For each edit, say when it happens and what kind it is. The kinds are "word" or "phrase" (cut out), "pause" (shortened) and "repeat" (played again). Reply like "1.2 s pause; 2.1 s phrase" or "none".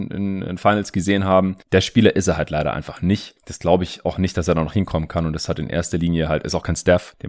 none